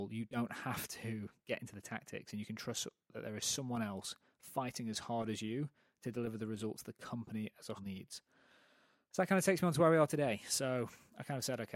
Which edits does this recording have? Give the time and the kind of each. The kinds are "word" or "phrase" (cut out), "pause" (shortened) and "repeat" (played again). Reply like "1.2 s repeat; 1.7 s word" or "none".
7.8 s word